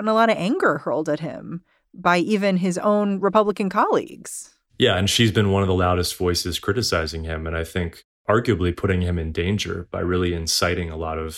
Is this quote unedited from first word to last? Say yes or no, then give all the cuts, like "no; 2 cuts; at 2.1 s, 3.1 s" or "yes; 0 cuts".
yes; 0 cuts